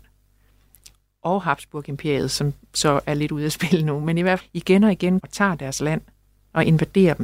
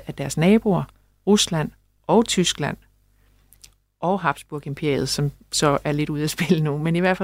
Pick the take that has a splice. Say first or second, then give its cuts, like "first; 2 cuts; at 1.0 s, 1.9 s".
first; 2 cuts; at 4.4 s, 5.2 s